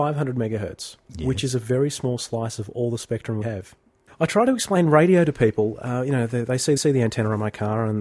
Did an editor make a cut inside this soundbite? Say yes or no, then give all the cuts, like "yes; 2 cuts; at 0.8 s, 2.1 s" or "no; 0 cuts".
yes; 3 cuts; at 1.0 s, 3.4 s, 6.8 s